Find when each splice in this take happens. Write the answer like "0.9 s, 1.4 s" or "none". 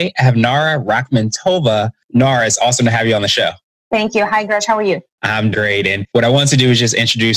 5.5 s